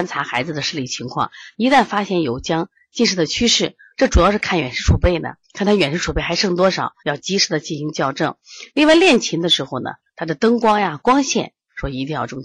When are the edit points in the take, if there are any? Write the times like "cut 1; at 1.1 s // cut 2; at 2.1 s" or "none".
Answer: cut 1; at 5.4 s // cut 2; at 7.0 s